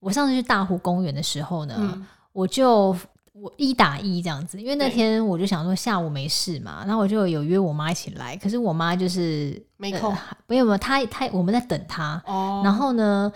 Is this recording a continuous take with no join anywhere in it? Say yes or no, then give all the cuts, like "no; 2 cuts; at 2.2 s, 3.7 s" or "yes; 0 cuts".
yes; 0 cuts